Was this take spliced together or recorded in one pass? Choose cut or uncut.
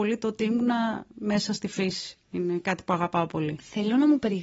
uncut